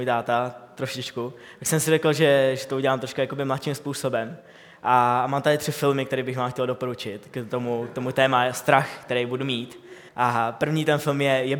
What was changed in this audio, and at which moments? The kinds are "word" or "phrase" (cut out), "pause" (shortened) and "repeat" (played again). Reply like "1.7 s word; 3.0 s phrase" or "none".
10.1 s pause